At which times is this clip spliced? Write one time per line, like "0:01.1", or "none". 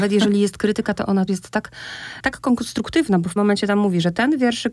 0:01.3
0:03.4